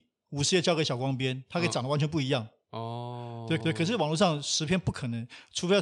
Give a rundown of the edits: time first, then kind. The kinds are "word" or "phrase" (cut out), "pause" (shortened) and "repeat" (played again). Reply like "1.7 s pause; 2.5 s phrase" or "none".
3.6 s repeat